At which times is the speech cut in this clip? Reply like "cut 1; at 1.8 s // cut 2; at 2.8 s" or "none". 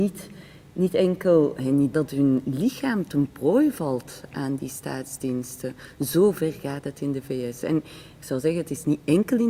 cut 1; at 1.9 s